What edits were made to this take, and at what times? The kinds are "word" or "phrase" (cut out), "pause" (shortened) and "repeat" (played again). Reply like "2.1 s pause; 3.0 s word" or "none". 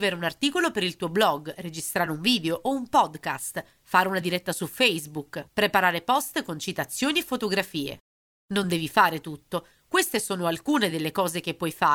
none

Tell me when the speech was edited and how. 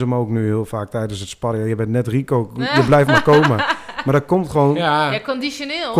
none

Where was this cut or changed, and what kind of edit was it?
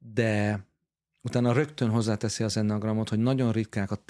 none

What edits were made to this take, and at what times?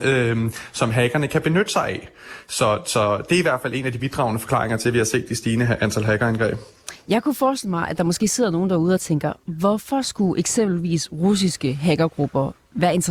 none

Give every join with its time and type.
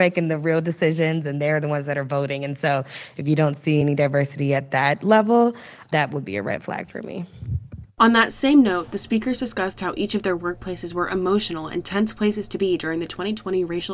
none

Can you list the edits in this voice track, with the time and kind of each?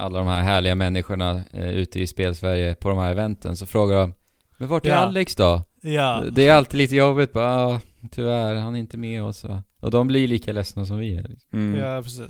none

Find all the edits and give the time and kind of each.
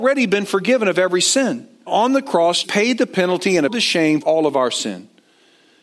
1.9 s word; 2.6 s word; 3.7 s word; 4.2 s word

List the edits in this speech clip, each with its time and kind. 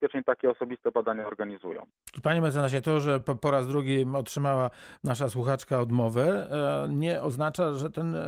none

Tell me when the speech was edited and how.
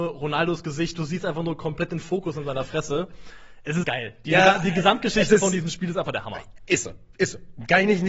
3.8 s word

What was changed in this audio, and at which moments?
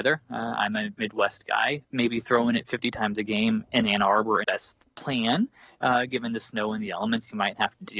1.8 s pause; 4.4 s phrase; 4.8 s pause

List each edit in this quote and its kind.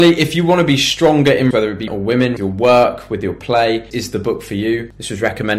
1.5 s word; 1.9 s word; 2.4 s word; 3.9 s word

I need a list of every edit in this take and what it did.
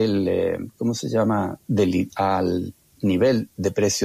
2.1 s phrase

